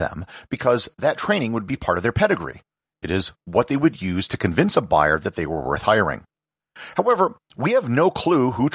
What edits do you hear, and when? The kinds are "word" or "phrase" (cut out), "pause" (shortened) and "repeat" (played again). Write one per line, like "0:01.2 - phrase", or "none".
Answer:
none